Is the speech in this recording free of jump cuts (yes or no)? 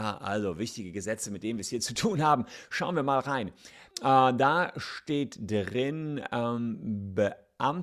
no